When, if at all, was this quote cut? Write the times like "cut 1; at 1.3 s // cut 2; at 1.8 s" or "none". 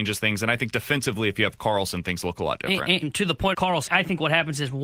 cut 1; at 3.0 s // cut 2; at 3.5 s // cut 3; at 3.9 s